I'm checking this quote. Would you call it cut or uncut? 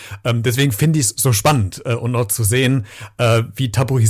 uncut